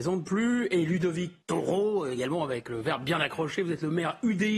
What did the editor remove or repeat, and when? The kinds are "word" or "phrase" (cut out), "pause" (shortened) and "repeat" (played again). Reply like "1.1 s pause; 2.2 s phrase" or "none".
1.4 s pause